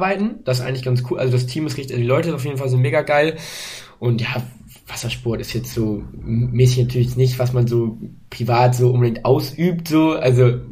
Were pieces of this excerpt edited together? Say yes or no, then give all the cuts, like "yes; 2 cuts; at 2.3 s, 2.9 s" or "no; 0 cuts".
no; 0 cuts